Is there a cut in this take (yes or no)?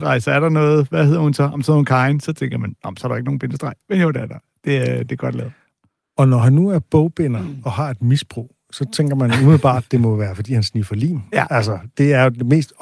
no